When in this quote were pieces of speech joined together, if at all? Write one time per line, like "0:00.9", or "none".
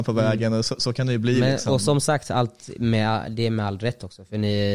none